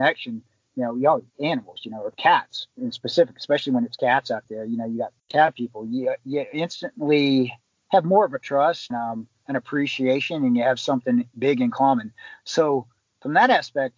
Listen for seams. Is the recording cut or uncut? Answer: cut